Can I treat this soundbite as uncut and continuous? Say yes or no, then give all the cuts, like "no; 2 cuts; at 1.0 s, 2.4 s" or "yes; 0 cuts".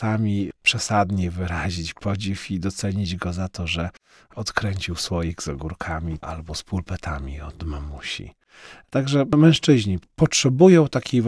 yes; 0 cuts